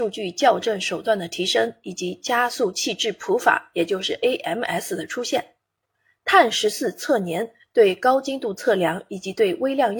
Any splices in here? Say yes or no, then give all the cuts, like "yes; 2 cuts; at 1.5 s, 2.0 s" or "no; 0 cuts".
no; 0 cuts